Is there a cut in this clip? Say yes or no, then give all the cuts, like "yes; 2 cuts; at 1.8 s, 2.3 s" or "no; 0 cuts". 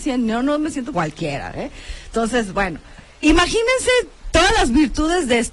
yes; 2 cuts; at 0.9 s, 3.2 s